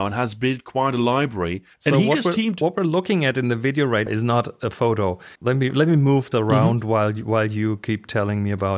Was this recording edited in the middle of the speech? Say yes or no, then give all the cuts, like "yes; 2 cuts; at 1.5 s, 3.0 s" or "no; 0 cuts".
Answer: yes; 4 cuts; at 1.7 s, 4.1 s, 5.3 s, 6.3 s